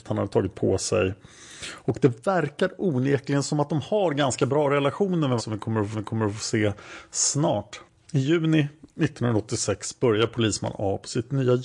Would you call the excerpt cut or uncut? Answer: cut